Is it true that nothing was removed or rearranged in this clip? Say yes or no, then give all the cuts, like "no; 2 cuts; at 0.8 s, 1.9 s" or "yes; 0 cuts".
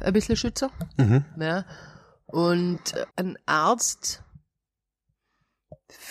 no; 1 cut; at 3.1 s